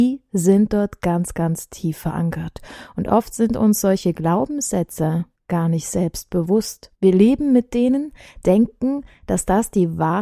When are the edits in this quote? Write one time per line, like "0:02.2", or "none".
0:05.4
0:06.9